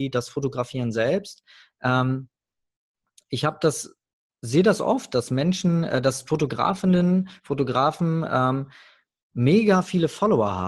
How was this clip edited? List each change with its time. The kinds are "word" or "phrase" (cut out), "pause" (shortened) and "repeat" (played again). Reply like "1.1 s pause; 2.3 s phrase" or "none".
none